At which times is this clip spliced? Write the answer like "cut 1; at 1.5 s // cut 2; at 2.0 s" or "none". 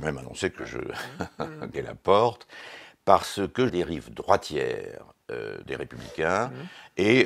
cut 1; at 1.7 s // cut 2; at 3.7 s // cut 3; at 5.6 s